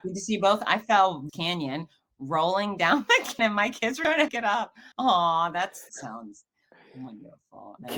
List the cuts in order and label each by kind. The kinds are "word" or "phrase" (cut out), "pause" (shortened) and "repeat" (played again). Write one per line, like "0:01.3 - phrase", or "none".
0:01.3 - phrase
0:03.4 - word
0:04.3 - phrase
0:04.9 - pause
0:05.9 - word

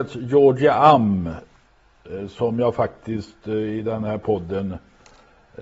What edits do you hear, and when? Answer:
none

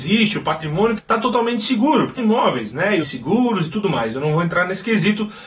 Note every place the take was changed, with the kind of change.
0:01.0 - phrase
0:02.2 - word
0:03.0 - phrase

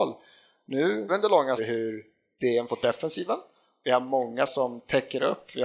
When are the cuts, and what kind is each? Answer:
0:01.1 - word
0:01.6 - word
0:02.7 - word
0:04.5 - word

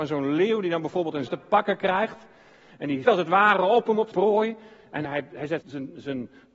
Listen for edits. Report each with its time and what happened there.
0:01.3 - word
0:03.0 - word
0:04.1 - word
0:05.0 - word
0:05.6 - word

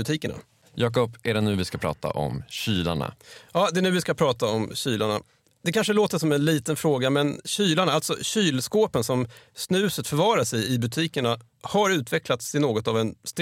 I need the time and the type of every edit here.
none

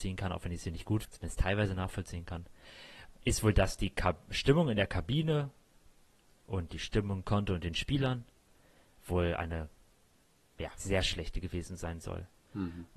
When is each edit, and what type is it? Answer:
0:01.0 - word
0:07.2 - word
0:10.8 - word

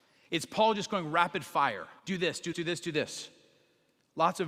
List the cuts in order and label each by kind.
0:02.0 - pause
0:02.5 - word

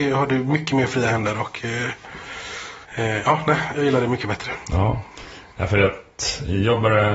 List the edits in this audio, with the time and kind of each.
0:02.8 - pause

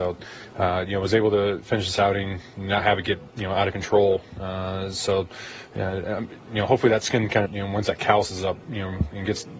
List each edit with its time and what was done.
0:07.5 - phrase

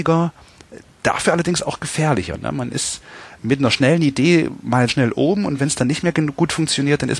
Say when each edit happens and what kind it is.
0:03.4 - word
0:04.9 - word

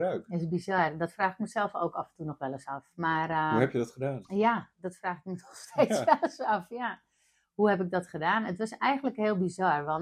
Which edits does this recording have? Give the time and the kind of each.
none

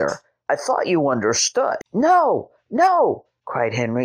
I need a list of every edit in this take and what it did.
0:01.9 - pause

